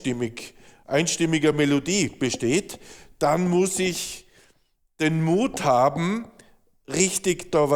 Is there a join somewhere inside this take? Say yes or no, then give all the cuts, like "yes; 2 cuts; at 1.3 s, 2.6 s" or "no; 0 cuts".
no; 0 cuts